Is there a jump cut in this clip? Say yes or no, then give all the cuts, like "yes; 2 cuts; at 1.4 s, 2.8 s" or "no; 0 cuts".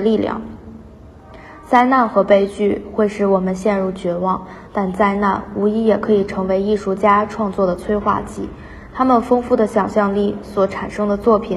no; 0 cuts